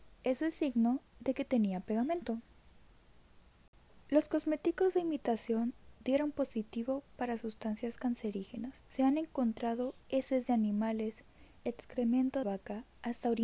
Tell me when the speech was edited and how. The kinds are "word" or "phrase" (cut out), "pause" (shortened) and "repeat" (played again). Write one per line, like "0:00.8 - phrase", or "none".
0:08.8 - pause
0:10.0 - pause
0:12.4 - word